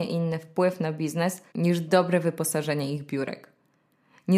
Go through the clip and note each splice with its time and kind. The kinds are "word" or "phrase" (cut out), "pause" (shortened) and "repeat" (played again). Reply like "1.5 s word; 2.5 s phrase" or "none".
1.5 s pause